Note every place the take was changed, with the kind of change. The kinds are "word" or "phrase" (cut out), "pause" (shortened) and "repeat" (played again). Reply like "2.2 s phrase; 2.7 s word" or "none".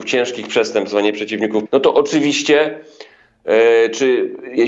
1.7 s word